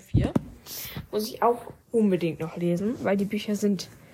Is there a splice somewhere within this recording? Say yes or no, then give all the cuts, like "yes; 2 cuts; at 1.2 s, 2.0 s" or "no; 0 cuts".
yes; 1 cut; at 1.8 s